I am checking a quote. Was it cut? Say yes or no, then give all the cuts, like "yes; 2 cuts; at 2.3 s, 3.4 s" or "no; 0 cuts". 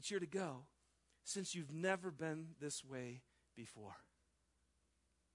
no; 0 cuts